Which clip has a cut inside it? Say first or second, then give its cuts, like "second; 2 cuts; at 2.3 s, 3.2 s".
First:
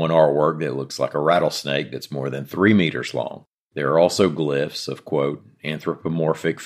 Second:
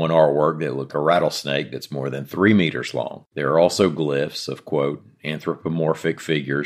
second; 2 cuts; at 0.9 s, 3.3 s